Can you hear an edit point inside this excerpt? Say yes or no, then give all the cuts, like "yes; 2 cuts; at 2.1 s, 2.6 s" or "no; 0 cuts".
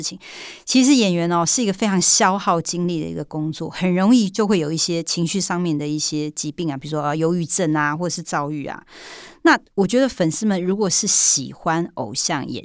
yes; 1 cut; at 9.7 s